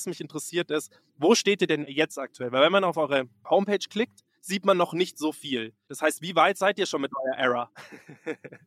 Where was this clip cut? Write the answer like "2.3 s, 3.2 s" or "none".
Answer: none